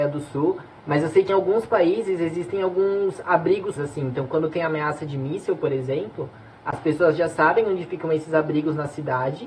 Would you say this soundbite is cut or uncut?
cut